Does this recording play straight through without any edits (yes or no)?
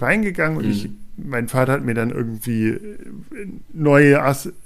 yes